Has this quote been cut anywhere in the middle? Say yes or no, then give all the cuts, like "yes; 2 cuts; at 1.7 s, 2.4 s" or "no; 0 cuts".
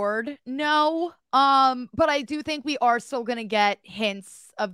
no; 0 cuts